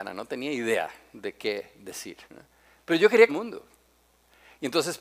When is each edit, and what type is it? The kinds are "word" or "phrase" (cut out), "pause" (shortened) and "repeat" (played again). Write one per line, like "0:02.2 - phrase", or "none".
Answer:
0:02.3 - pause
0:03.3 - phrase